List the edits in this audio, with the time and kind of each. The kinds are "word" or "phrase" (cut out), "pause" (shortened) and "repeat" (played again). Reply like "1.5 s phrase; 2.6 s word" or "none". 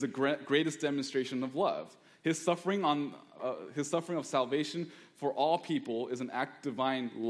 3.4 s word